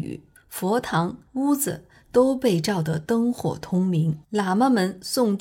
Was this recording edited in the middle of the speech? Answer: yes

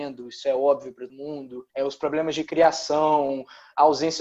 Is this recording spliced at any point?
yes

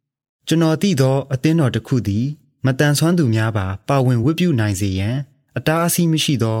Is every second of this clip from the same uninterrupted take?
yes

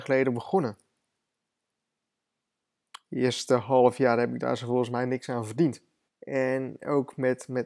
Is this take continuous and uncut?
no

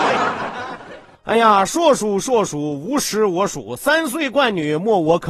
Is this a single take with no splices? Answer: yes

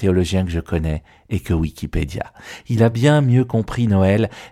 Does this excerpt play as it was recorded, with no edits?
yes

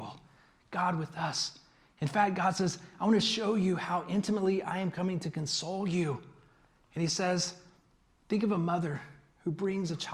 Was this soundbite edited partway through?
no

